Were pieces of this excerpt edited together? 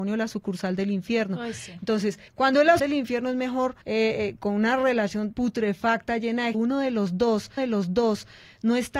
yes; 6 cuts; at 2.3 s, 2.8 s, 3.8 s, 5.3 s, 6.5 s, 7.6 s

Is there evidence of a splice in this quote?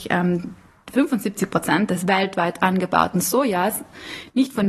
no; 0 cuts

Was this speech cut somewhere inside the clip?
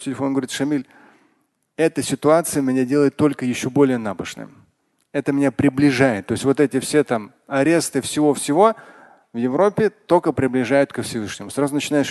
no; 0 cuts

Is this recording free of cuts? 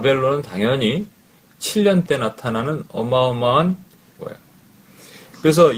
no; 2 cuts; at 2.1 s, 4.2 s

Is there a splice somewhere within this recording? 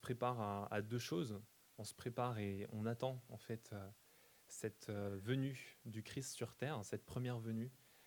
no; 0 cuts

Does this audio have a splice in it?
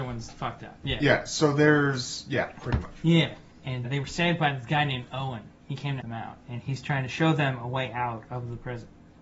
yes; 2 cuts; at 3.8 s, 6.0 s

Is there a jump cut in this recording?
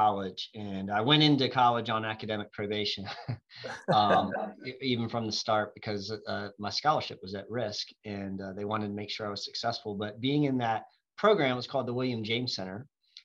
no; 0 cuts

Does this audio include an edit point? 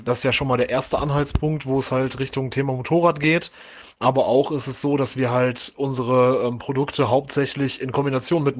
no; 0 cuts

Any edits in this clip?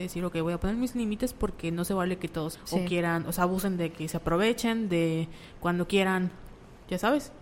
yes; 1 cut; at 2.5 s

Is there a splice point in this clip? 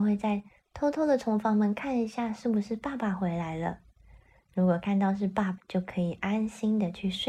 yes; 1 cut; at 5.6 s

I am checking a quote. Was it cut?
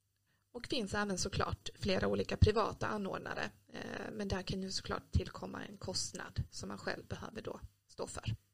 no; 0 cuts

